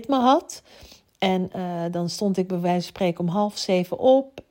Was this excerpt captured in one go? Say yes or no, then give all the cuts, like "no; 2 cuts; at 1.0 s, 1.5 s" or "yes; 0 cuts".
yes; 0 cuts